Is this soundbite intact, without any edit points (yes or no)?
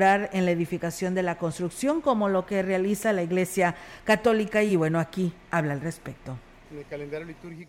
yes